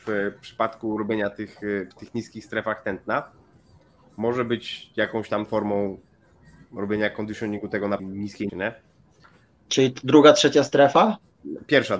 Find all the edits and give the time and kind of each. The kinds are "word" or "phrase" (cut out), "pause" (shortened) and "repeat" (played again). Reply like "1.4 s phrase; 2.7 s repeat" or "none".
1.9 s word; 5.5 s word; 8.0 s word; 8.5 s word

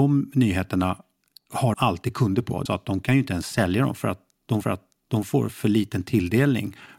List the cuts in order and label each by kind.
1.7 s word; 2.7 s phrase; 4.6 s repeat

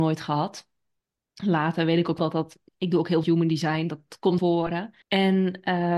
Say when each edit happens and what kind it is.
2.2 s word; 2.7 s pause; 3.2 s word; 4.4 s phrase; 5.0 s pause

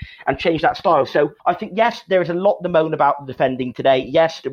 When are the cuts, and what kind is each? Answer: 1.4 s pause

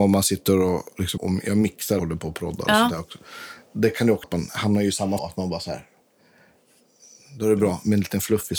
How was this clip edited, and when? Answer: 1.2 s word; 2.0 s word; 4.2 s word; 5.2 s word

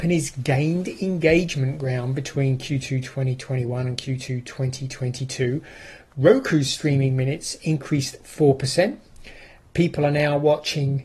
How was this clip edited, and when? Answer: none

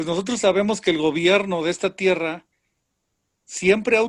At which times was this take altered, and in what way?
none

